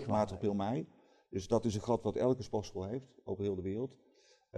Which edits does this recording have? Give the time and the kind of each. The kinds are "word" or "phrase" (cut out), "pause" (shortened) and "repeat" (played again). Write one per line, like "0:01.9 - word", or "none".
none